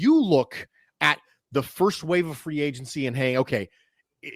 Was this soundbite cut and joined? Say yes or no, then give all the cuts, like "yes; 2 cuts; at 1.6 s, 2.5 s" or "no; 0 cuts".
no; 0 cuts